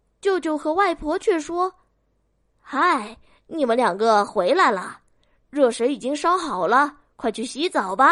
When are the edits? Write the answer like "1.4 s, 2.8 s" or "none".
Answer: none